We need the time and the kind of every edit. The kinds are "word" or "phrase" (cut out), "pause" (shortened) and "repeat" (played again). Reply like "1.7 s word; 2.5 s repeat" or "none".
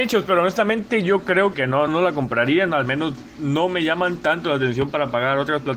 1.5 s word; 1.9 s word